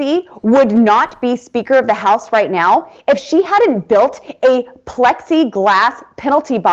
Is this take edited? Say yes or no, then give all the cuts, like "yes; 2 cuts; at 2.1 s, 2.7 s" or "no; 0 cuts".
no; 0 cuts